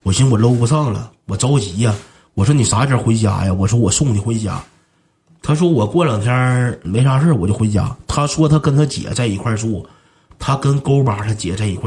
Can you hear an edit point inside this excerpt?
no; 0 cuts

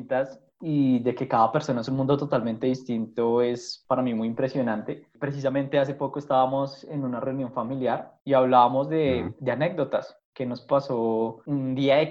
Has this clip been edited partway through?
no; 0 cuts

